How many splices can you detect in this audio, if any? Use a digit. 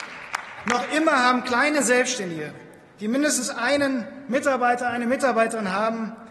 0